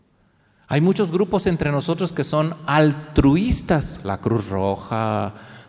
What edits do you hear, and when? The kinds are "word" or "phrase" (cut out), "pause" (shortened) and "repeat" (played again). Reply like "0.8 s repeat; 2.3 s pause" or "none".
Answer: none